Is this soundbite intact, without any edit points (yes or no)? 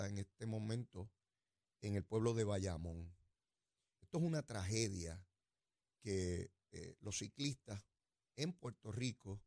yes